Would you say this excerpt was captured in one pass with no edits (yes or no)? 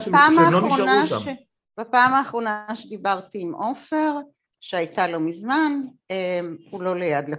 yes